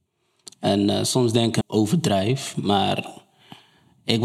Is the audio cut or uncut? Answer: cut